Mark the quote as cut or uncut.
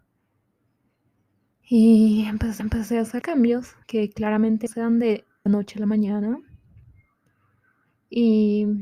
cut